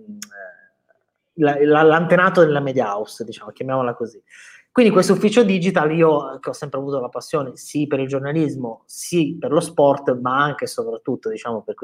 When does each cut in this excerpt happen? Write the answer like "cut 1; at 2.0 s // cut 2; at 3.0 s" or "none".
none